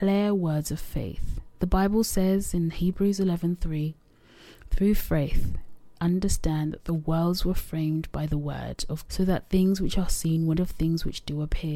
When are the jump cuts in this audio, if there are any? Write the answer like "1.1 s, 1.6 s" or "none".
1.5 s, 6.0 s, 9.1 s, 10.6 s